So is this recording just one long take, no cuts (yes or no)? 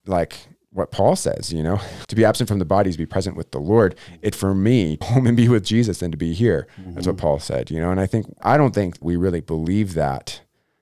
no